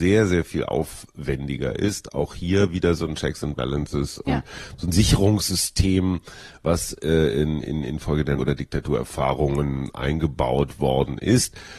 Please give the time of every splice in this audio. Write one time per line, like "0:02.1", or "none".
0:08.4